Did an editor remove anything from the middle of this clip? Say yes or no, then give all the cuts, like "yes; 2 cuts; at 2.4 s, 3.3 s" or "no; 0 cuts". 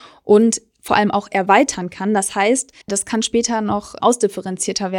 yes; 1 cut; at 2.8 s